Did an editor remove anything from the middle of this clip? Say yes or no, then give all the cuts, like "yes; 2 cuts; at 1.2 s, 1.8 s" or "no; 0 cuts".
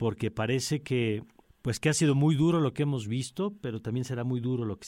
yes; 1 cut; at 1.4 s